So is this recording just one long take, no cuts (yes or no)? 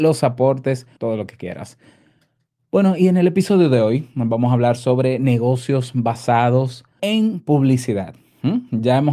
no